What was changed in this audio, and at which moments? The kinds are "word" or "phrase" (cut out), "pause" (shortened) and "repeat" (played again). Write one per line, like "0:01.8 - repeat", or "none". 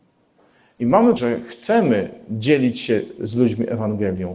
0:01.2 - word